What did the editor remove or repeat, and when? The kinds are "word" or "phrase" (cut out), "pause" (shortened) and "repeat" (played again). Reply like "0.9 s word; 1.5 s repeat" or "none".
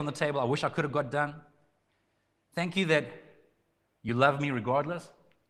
none